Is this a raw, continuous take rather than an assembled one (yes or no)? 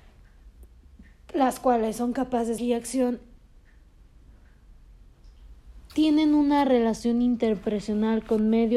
no